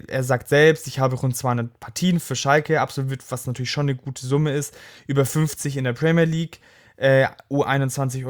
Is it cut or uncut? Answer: uncut